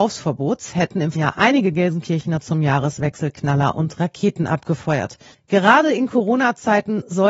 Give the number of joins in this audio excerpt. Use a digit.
2